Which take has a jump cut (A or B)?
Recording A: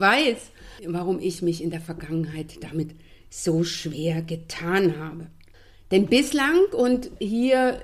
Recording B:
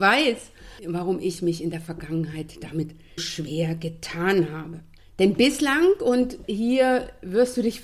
B